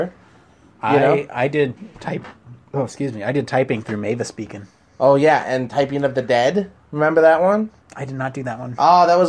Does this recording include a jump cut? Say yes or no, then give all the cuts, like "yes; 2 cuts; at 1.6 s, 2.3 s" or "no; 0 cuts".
no; 0 cuts